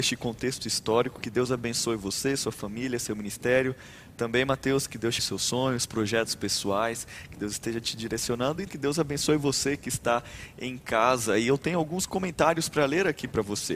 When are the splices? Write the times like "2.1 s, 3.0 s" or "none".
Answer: 5.2 s, 8.7 s